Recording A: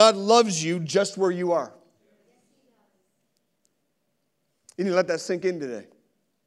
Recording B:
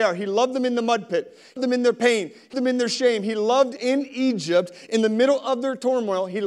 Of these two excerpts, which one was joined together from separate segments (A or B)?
B